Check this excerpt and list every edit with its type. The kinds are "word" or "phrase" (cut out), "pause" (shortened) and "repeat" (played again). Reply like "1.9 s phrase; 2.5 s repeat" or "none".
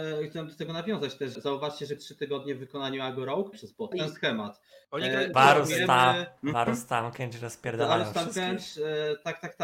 1.3 s word; 2.0 s word; 3.5 s phrase; 3.9 s phrase; 5.3 s phrase; 6.4 s pause